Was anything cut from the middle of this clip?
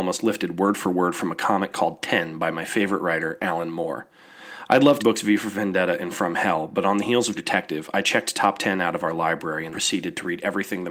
yes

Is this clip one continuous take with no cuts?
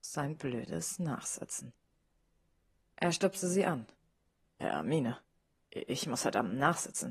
yes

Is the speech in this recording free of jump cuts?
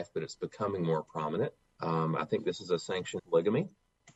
no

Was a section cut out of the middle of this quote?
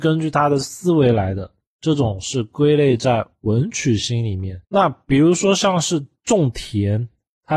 yes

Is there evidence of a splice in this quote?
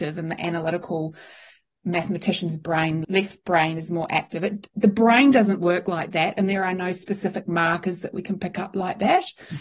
yes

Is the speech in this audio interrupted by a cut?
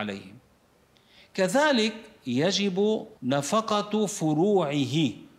yes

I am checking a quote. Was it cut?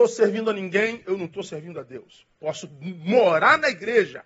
no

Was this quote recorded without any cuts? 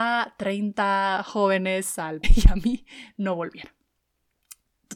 no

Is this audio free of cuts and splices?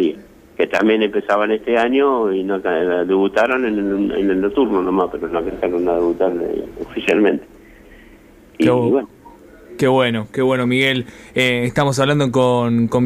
yes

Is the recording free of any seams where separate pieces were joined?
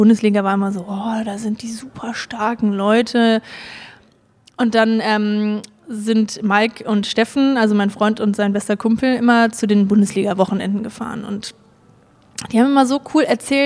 yes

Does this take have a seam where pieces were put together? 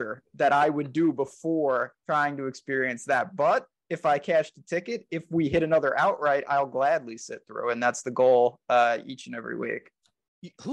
yes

